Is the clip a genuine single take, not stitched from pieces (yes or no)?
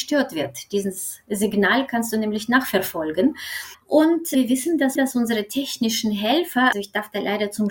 no